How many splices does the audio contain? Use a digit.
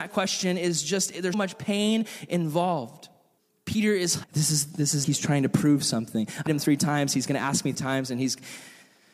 6